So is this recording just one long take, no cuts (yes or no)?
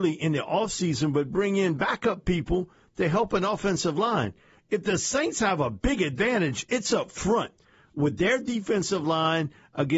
yes